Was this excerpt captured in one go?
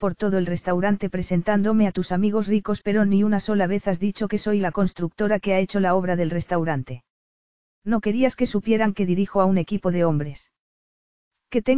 yes; 0 cuts

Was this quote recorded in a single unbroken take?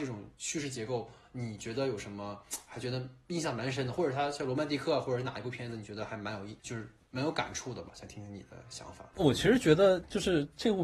no; 1 cut; at 6.6 s

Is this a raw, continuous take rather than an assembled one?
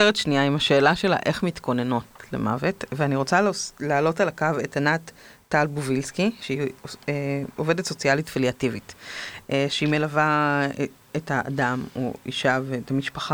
yes; 0 cuts

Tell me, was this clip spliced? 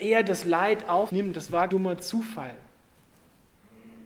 yes; 2 cuts; at 1.1 s, 1.7 s

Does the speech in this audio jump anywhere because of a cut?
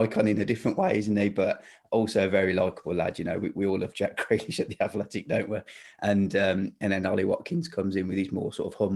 no; 0 cuts

